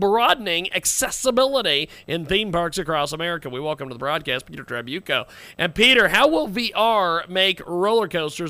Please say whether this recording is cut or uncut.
uncut